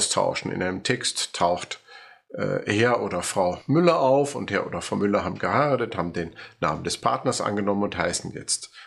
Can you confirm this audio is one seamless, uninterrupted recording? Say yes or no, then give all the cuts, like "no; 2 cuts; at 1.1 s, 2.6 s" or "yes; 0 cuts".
yes; 0 cuts